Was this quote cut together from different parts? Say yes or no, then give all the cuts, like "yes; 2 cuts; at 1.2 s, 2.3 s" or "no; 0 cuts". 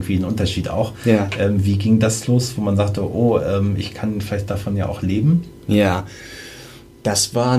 no; 0 cuts